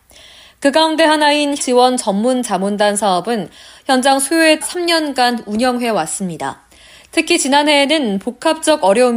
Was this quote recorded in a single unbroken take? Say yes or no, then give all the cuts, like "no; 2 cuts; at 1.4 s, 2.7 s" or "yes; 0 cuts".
no; 2 cuts; at 1.6 s, 4.6 s